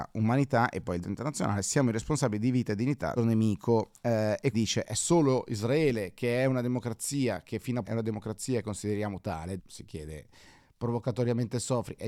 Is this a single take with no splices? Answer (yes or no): no